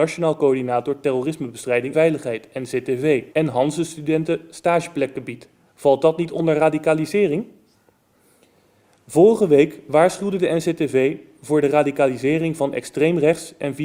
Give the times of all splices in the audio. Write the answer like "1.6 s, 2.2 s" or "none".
1.9 s, 3.3 s, 5.7 s

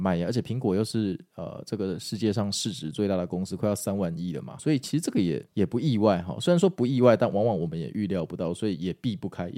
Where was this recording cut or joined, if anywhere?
4.6 s, 5.5 s

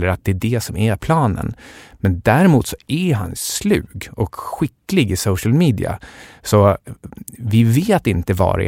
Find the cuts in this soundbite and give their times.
none

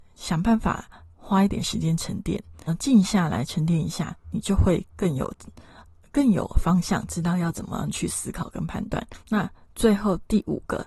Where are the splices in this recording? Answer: 2.7 s, 9.2 s

